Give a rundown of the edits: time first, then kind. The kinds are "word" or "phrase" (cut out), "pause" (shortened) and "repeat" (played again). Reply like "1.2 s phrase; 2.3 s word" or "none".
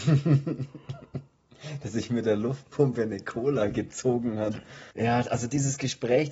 4.9 s pause